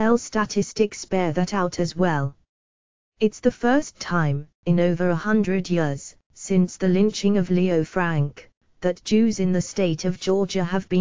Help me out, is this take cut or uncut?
uncut